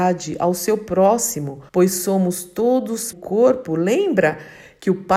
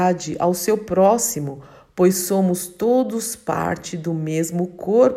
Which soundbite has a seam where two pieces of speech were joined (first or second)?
first